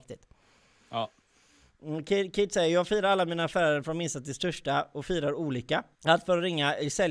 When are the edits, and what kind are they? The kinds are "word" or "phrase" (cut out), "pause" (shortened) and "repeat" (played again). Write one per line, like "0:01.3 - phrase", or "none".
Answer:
0:05.9 - pause